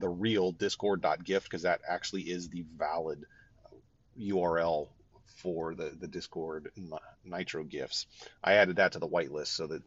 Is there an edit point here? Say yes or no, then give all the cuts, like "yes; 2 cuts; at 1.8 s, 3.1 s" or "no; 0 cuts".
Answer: no; 0 cuts